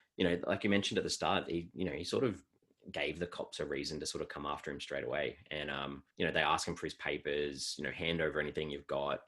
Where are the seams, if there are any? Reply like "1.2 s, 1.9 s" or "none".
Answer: 2.6 s, 6.1 s

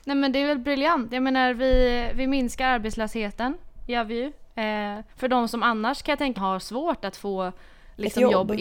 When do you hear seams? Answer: 5.1 s, 6.4 s

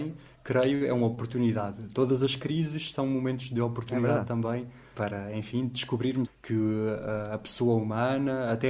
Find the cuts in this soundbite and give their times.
4.9 s, 6.3 s

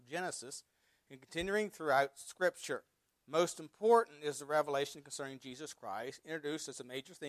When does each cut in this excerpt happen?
3.1 s

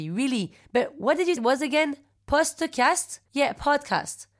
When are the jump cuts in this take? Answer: 1.4 s, 3.3 s

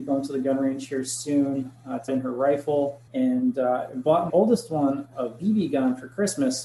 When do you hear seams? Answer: 2.1 s, 3.1 s, 4.3 s

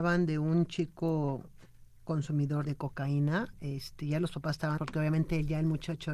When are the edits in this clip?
2.6 s, 4.8 s

